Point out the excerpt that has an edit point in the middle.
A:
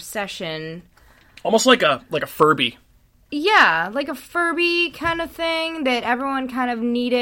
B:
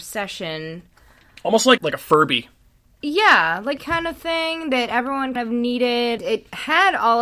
B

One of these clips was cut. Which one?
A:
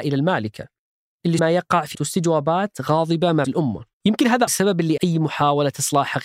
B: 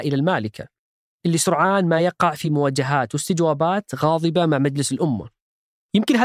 A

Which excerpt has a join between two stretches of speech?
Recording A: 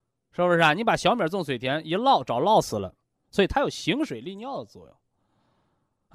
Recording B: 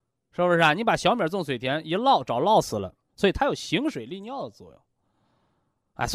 B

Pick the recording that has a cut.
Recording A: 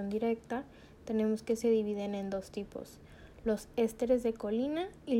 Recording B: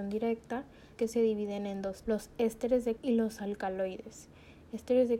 B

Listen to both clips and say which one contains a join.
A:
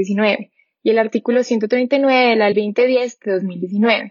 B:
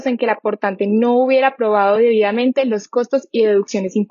A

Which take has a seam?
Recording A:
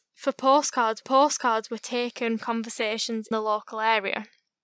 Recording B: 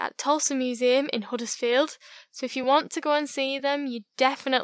A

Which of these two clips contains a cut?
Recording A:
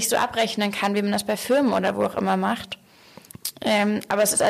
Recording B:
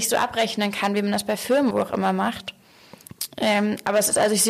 B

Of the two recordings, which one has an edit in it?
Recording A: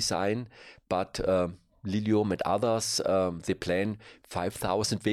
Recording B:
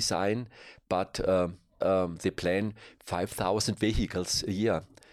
B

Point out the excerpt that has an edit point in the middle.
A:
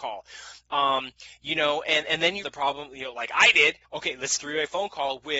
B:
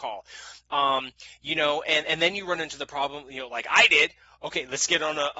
A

